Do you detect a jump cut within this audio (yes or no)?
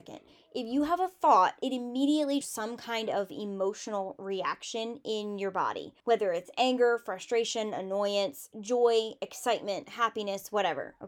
yes